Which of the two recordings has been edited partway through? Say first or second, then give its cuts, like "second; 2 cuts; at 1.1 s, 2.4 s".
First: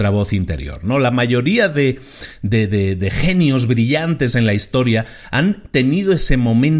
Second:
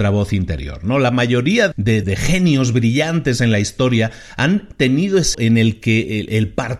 second; 3 cuts; at 1.7 s, 2.0 s, 5.3 s